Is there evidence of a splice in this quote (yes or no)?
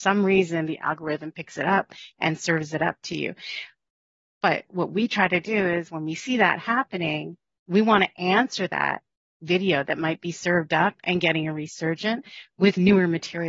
no